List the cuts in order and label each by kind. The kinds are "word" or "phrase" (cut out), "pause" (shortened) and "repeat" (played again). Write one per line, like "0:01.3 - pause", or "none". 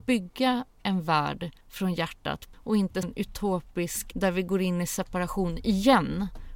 0:01.6 - pause
0:02.5 - word
0:03.0 - word
0:04.1 - word